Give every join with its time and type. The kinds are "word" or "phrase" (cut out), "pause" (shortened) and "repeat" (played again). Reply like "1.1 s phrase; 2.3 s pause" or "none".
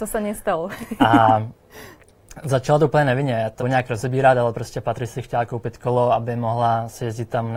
3.6 s word